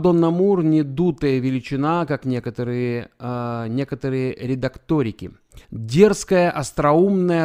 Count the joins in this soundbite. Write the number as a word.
one